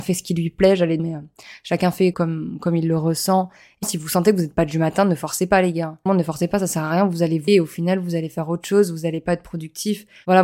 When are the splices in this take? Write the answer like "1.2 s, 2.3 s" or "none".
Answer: 1.0 s, 2.1 s, 3.8 s, 6.1 s, 7.5 s